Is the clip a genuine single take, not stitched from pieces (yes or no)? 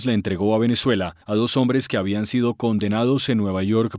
no